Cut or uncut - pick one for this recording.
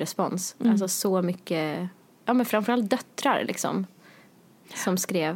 uncut